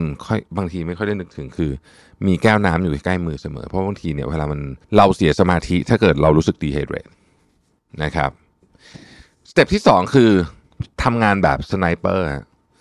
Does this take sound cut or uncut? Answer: cut